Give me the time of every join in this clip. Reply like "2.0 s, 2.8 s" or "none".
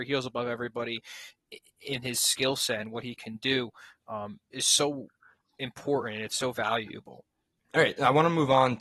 none